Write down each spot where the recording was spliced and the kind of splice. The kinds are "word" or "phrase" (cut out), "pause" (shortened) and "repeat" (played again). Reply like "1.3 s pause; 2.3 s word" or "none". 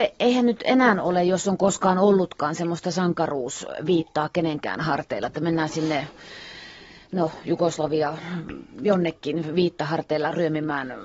none

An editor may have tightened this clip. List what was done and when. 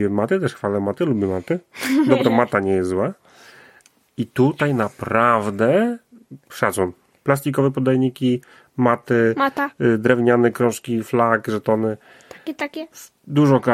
none

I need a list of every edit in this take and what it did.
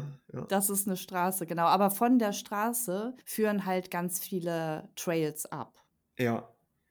3.2 s pause

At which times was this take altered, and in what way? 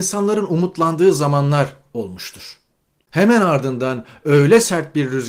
none

